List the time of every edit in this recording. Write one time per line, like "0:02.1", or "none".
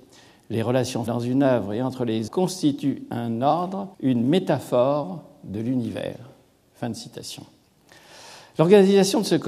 0:01.1
0:02.3
0:03.9